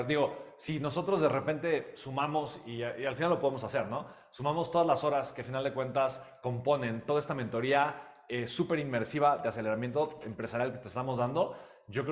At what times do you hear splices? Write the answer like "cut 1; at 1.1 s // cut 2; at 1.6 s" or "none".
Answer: none